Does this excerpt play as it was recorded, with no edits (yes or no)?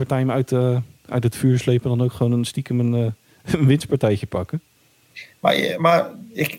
yes